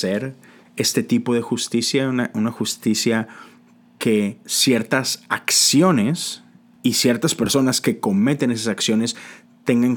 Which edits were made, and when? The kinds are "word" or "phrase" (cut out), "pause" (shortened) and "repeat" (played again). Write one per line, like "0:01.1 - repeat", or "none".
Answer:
0:04.0 - phrase
0:04.4 - pause
0:06.6 - pause